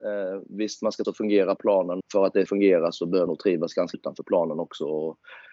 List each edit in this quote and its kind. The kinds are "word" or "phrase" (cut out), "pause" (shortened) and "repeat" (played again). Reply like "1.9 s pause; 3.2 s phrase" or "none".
1.0 s word; 1.6 s word; 2.0 s word; 2.5 s word; 3.3 s word; 3.9 s word